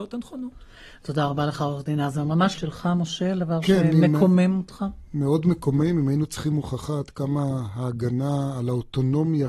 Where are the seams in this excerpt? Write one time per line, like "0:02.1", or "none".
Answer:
0:02.6

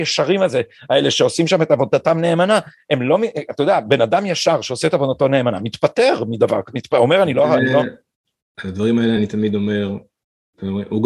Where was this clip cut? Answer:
none

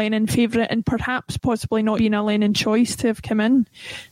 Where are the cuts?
0:01.4
0:02.0

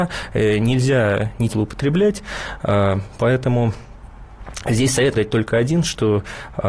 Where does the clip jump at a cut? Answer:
0:01.5
0:05.1

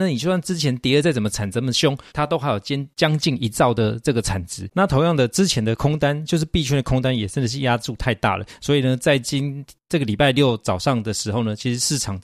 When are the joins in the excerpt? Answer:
0:02.1

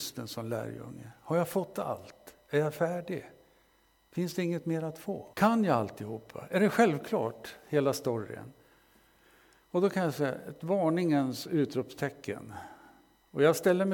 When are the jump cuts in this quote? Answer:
0:05.3

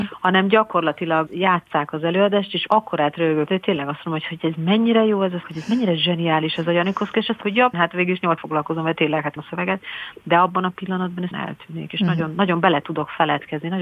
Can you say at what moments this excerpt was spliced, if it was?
0:01.3
0:02.7
0:03.5
0:05.4
0:07.4
0:07.7
0:08.4
0:09.4
0:11.3

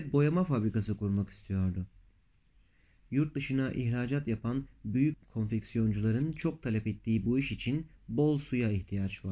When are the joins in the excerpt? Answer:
none

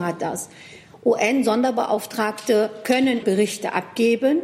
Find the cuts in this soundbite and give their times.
0:03.2

